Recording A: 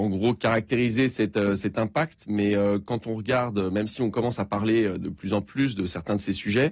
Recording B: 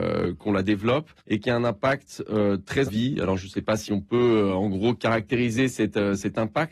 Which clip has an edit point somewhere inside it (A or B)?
B